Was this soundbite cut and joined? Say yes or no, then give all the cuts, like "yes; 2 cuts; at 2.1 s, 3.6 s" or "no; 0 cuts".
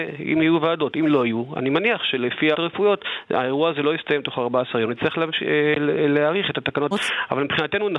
yes; 2 cuts; at 2.5 s, 6.9 s